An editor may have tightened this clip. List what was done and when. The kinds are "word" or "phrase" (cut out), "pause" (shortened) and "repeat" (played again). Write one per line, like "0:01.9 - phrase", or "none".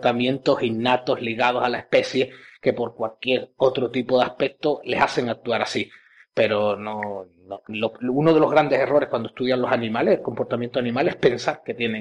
none